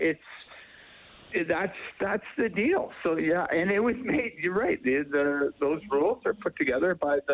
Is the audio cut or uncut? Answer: uncut